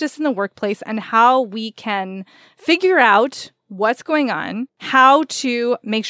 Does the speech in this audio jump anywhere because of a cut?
no; 0 cuts

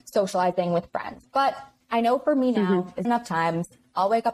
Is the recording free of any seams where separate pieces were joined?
no; 1 cut; at 3.0 s

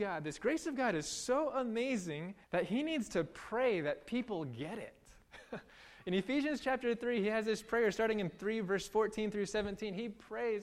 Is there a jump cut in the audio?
yes; 1 cut; at 2.4 s

